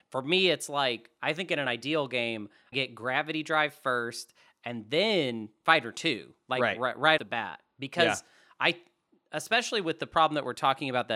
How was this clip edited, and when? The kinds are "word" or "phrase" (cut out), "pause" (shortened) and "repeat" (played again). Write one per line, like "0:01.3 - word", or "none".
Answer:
0:02.7 - word
0:07.2 - word